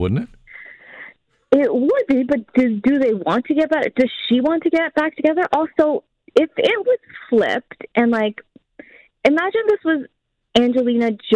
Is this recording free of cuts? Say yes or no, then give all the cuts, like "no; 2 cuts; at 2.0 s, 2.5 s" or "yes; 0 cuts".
yes; 0 cuts